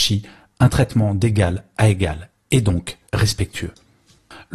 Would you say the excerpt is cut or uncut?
cut